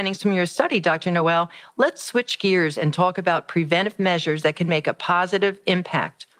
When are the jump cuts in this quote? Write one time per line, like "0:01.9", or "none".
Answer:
none

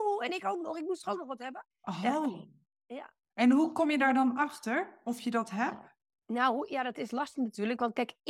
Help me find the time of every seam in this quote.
0:01.7
0:03.2
0:06.0

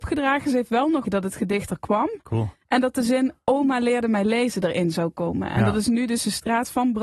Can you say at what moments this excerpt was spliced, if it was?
0:01.0

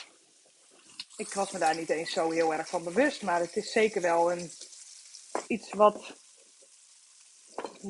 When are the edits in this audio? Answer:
0:05.5

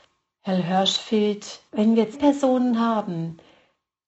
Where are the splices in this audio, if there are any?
0:01.7
0:02.1

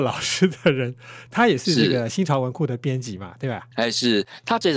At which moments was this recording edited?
0:03.7

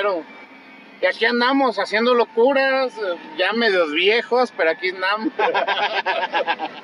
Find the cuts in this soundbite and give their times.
none

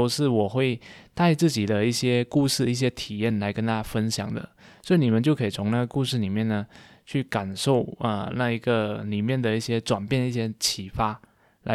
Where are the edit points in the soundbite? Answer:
none

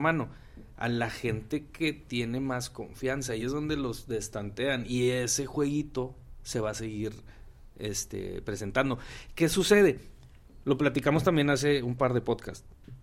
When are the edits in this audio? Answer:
0:03.4

